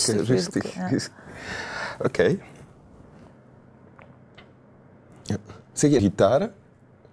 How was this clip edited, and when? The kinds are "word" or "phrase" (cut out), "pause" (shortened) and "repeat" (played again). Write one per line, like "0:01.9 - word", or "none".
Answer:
0:06.0 - word